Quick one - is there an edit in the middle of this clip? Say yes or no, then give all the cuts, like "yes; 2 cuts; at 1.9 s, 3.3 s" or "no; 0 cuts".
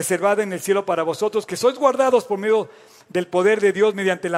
no; 0 cuts